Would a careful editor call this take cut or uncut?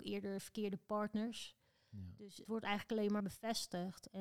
cut